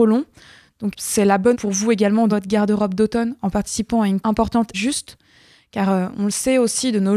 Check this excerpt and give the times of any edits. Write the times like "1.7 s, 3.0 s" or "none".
0.9 s, 1.5 s, 2.3 s, 4.2 s, 4.7 s